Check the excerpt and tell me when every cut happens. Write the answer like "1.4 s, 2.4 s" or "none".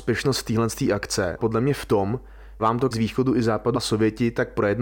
1.4 s, 2.6 s, 2.9 s, 3.7 s